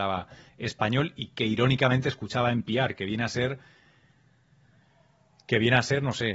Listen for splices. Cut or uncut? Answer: uncut